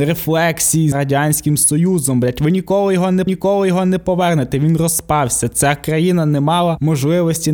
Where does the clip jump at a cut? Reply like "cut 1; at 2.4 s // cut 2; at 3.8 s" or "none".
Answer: cut 1; at 0.9 s // cut 2; at 3.3 s